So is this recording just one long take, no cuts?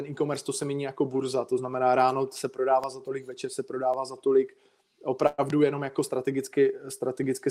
yes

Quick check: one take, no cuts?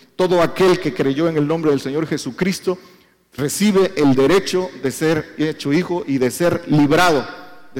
yes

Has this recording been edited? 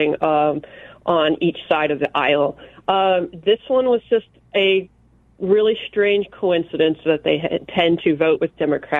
no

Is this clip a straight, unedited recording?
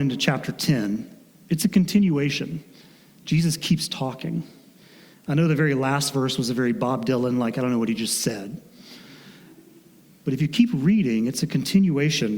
yes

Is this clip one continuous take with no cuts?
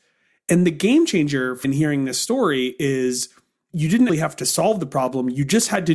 no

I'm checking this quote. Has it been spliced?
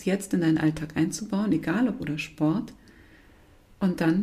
yes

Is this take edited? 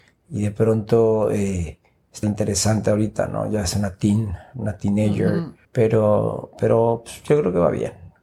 yes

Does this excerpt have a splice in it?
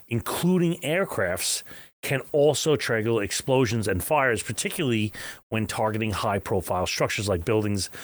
no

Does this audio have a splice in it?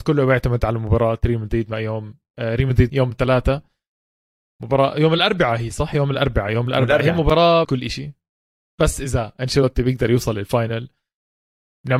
yes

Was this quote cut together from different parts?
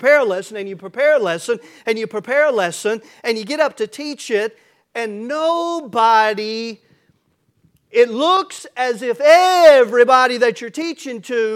no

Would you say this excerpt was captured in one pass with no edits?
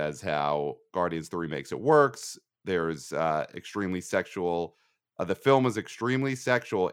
yes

